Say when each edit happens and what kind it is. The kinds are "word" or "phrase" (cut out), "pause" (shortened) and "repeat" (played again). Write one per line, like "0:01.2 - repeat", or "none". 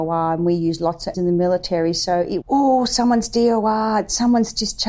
0:01.1 - word
0:02.4 - word